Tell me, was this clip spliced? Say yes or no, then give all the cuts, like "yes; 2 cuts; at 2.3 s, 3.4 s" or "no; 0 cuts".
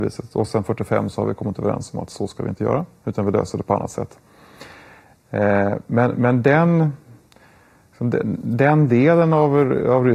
no; 0 cuts